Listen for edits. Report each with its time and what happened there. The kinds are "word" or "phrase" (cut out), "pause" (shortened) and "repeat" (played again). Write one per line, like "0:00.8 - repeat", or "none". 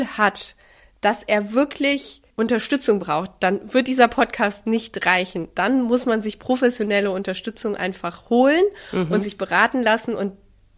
0:02.3 - pause